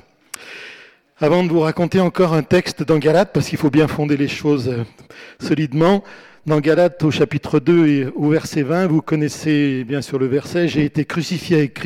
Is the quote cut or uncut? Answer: uncut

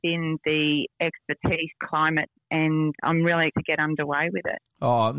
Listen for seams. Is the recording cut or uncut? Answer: cut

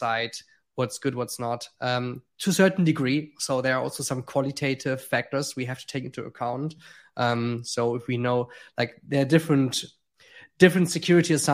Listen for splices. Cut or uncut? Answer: uncut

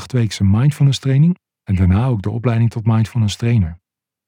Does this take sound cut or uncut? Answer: uncut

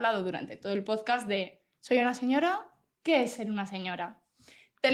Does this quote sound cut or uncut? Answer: uncut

